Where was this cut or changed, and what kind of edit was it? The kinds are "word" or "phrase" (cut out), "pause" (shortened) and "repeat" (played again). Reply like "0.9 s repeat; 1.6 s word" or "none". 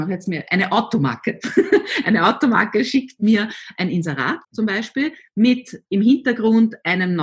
4.4 s pause